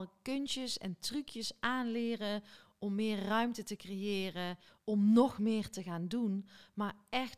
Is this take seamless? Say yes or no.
yes